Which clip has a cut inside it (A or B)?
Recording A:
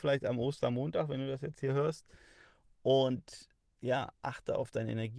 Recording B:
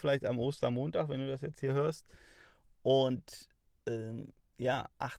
A